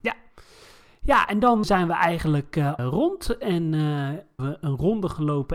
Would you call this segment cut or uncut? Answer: cut